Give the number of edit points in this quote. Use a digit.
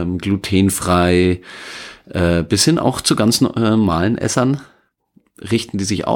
0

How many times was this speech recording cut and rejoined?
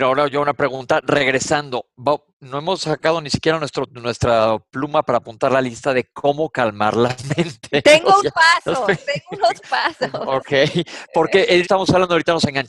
3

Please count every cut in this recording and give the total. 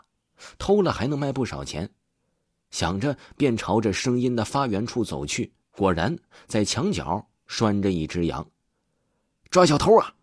1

